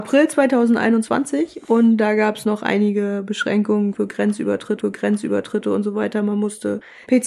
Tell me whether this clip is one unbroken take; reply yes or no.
no